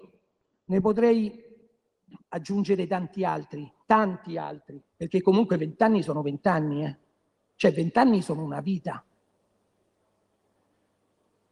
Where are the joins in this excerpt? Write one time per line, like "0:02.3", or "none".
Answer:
0:03.8
0:04.9
0:07.3